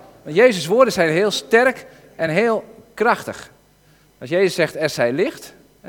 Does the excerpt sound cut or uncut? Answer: uncut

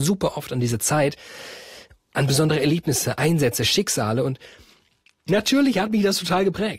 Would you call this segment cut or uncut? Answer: uncut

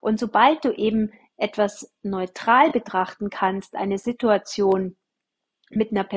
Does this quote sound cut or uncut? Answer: uncut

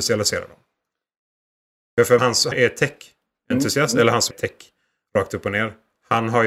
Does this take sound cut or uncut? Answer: cut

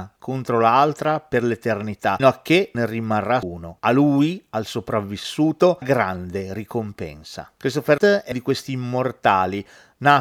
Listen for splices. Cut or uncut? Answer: cut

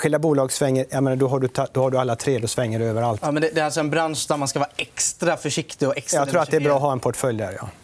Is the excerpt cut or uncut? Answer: uncut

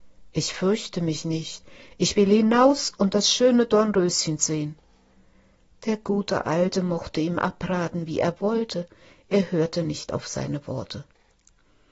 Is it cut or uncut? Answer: uncut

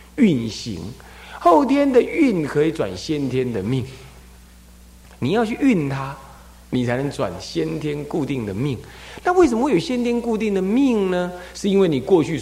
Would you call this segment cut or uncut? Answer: uncut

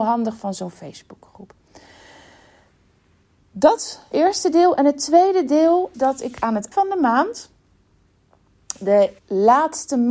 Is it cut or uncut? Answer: cut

